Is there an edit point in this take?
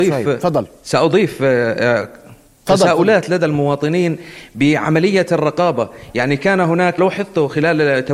yes; 2 cuts; at 2.5 s, 7.0 s

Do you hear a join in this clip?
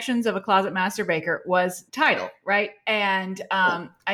yes; 1 cut; at 1.9 s

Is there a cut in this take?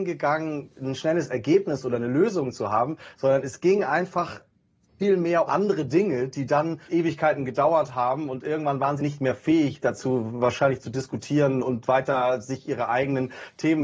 yes; 3 cuts; at 5.5 s, 6.9 s, 9.0 s

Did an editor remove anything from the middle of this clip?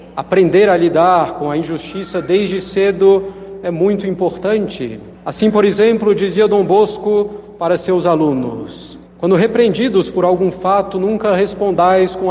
yes; 2 cuts; at 5.2 s, 9.1 s

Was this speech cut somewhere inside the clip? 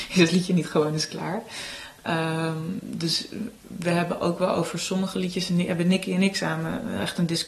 no; 0 cuts

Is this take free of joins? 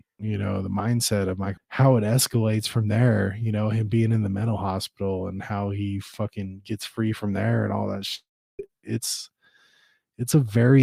no; 1 cut; at 1.6 s

